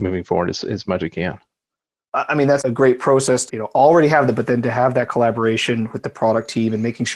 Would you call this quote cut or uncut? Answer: cut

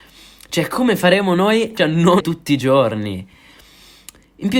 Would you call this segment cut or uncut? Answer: cut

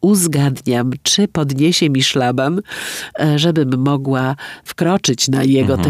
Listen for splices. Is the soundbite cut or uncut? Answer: uncut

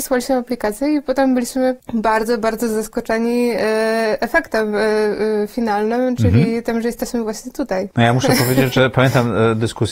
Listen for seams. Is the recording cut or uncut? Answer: uncut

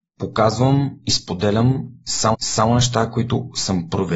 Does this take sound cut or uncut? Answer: cut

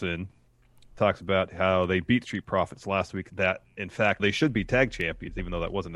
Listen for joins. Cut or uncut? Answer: cut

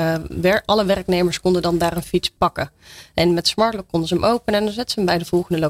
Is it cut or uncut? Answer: uncut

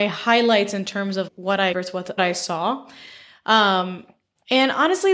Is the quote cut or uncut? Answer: cut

